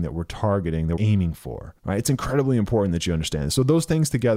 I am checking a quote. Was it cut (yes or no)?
yes